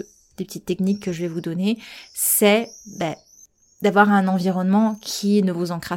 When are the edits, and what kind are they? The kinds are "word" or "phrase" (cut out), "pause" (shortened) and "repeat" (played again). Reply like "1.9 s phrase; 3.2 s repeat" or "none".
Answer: none